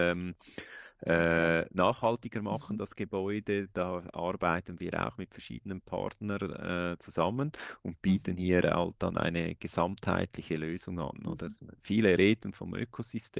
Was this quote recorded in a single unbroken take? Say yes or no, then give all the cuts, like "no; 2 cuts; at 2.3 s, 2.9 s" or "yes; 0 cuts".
no; 1 cut; at 11.8 s